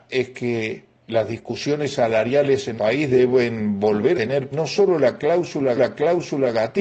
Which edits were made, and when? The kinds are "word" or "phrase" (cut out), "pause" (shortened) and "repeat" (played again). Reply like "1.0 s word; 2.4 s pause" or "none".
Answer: 0.9 s pause; 2.8 s word; 4.1 s word; 4.5 s word; 5.8 s repeat